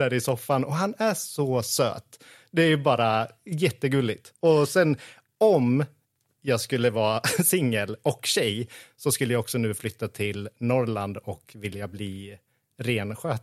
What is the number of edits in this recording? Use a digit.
0